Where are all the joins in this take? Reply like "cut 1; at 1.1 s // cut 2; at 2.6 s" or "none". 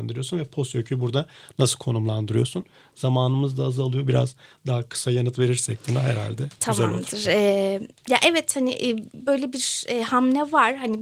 none